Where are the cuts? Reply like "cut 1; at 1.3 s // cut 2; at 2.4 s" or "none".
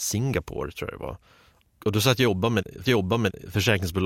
cut 1; at 2.8 s